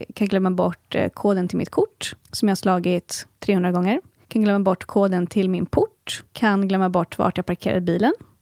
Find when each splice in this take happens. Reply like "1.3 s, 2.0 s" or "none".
2.2 s, 3.3 s, 4.2 s, 6.3 s